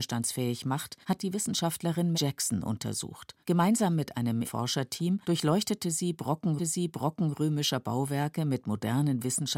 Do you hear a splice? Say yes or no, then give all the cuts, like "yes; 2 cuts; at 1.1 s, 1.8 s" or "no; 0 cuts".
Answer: yes; 6 cuts; at 1.0 s, 2.1 s, 3.4 s, 4.4 s, 5.2 s, 6.6 s